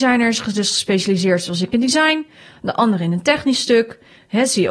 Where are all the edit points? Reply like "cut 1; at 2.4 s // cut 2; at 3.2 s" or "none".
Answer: none